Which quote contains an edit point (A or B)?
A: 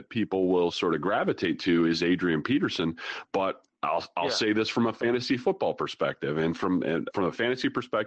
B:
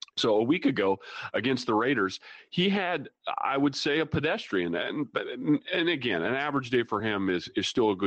A